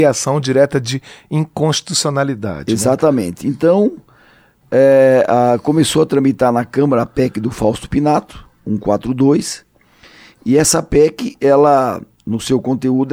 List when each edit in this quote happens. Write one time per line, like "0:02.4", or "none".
none